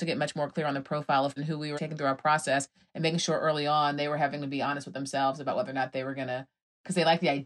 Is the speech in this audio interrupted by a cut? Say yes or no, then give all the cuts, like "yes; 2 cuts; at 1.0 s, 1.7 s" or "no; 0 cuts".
yes; 2 cuts; at 1.4 s, 1.8 s